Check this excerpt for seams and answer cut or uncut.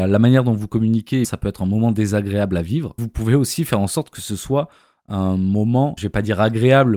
cut